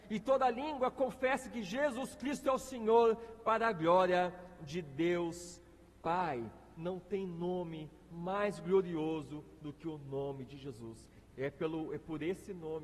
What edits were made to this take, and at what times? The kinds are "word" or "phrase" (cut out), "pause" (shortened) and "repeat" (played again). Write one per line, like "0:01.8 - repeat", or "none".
none